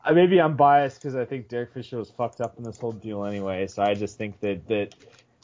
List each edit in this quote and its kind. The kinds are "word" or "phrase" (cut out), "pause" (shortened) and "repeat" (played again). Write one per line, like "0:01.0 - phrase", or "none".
none